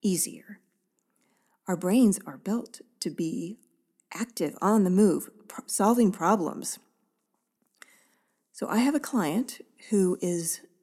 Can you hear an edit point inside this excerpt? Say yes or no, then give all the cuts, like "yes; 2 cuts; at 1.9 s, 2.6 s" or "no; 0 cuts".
no; 0 cuts